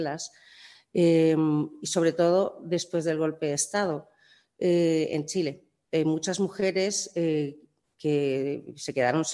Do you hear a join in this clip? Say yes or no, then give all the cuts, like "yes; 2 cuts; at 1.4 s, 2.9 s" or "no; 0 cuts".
no; 0 cuts